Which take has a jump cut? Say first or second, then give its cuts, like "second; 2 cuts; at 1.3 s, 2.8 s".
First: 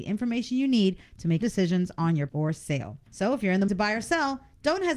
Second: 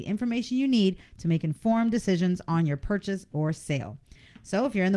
first; 4 cuts; at 1.4 s, 2.3 s, 3.1 s, 3.7 s